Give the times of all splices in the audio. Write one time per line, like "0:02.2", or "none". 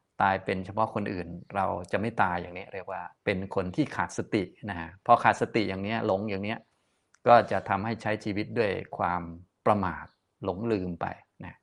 0:03.2